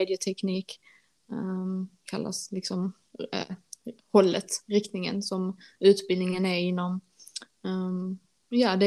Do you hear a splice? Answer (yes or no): no